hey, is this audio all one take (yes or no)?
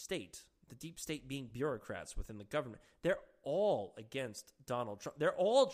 yes